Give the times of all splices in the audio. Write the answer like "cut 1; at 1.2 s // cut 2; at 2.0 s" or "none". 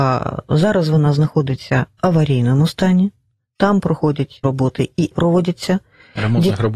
cut 1; at 2.0 s // cut 2; at 4.4 s // cut 3; at 5.1 s